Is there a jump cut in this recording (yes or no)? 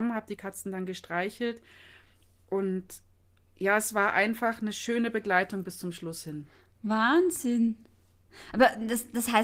no